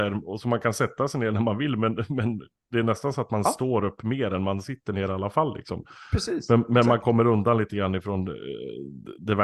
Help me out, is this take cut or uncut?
uncut